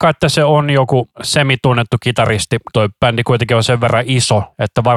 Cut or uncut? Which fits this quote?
cut